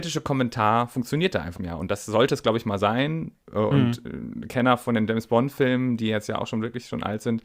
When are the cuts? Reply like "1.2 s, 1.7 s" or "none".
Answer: 1.6 s

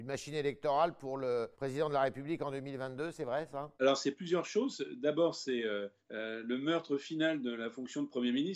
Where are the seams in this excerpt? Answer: 1.5 s, 3.7 s, 6.0 s

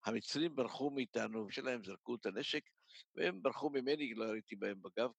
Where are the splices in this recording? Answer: 1.5 s

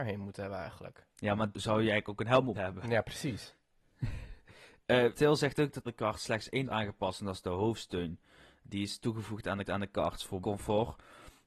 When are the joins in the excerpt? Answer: 1.1 s, 1.5 s, 2.5 s, 5.1 s, 5.9 s, 6.7 s, 9.6 s, 10.4 s

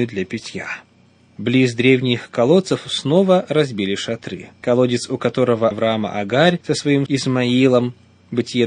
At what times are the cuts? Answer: 5.7 s, 7.1 s

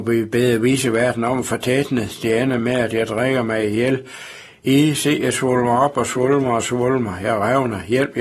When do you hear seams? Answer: none

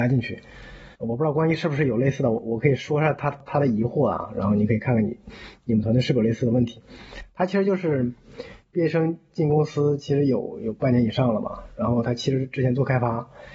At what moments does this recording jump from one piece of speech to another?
0.9 s

